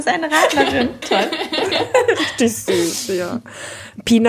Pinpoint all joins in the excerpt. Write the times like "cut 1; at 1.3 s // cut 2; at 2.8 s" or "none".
cut 1; at 1.0 s